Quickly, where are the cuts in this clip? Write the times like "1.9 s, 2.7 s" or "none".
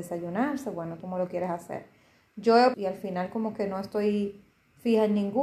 1.0 s, 2.7 s